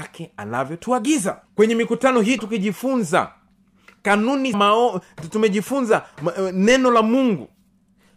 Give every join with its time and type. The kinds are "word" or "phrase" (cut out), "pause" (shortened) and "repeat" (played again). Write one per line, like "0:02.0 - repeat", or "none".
0:01.4 - pause
0:02.4 - word
0:04.5 - word